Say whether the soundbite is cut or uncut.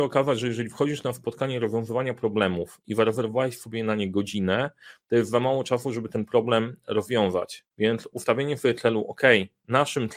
cut